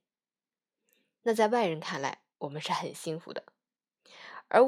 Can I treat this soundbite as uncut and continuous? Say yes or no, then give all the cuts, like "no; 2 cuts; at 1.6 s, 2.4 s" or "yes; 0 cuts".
no; 1 cut; at 2.3 s